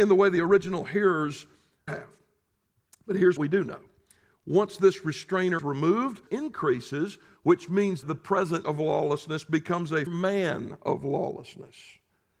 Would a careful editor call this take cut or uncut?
cut